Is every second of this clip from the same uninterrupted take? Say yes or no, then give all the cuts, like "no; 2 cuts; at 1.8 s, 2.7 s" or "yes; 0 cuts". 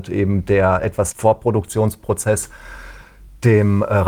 no; 1 cut; at 1.1 s